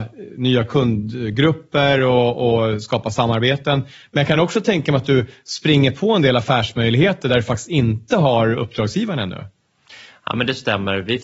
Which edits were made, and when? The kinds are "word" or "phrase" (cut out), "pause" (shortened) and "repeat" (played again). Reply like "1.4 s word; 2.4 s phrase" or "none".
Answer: none